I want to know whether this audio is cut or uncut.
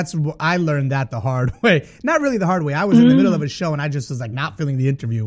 uncut